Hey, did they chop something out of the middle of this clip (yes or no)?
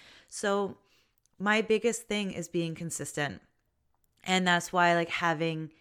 no